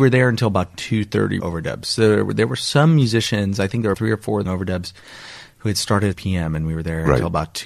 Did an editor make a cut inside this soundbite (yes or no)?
yes